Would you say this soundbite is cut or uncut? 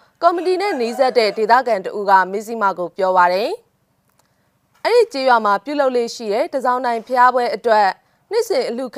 uncut